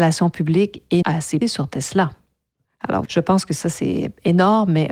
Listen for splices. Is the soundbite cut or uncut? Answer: cut